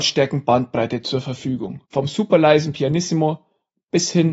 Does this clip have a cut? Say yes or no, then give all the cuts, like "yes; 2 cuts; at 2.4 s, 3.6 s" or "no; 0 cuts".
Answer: yes; 1 cut; at 1.9 s